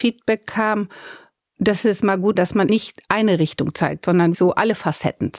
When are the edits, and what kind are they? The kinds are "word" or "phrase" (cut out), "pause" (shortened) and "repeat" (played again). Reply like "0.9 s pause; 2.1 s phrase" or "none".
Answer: 2.3 s word; 2.7 s word; 4.3 s word